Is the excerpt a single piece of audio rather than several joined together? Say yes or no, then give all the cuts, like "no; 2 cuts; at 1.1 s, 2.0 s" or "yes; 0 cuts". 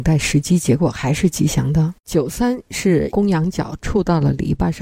no; 1 cut; at 2.0 s